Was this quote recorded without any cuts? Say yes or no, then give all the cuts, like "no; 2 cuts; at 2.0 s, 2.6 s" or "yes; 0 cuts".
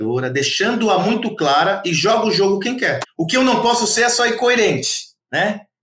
yes; 0 cuts